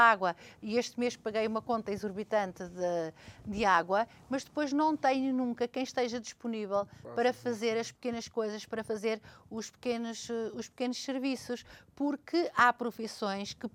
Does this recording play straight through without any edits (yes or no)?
yes